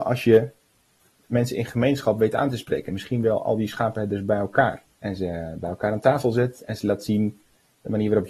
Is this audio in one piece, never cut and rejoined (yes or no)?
no